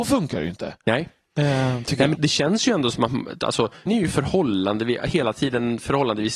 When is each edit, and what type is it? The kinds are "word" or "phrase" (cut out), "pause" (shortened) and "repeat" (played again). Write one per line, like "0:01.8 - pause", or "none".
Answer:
0:02.1 - word
0:03.9 - word